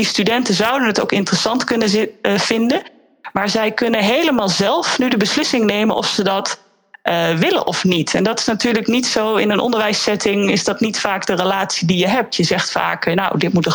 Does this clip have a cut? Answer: no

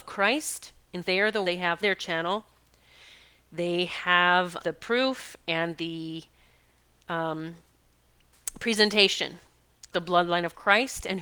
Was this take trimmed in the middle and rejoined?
yes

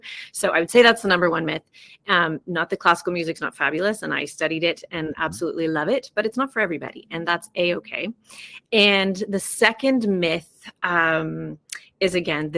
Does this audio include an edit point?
no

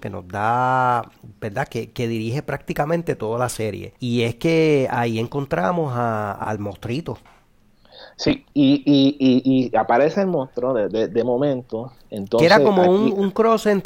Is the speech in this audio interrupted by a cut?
yes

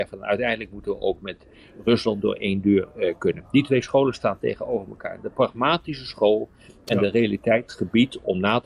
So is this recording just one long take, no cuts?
yes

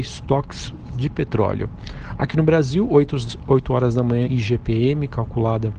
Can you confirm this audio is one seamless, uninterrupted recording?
no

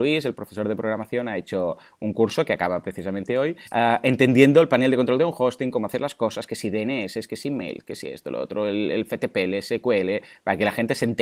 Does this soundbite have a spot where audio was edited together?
yes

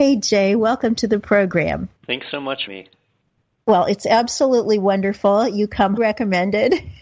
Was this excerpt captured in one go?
no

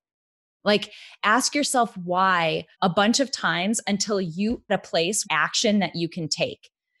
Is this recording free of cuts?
no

